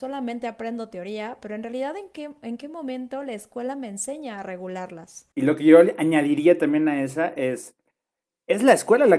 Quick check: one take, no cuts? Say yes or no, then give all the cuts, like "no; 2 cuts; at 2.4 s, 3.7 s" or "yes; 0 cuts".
no; 1 cut; at 5.3 s